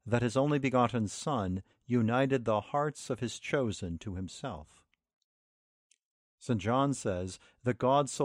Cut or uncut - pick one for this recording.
uncut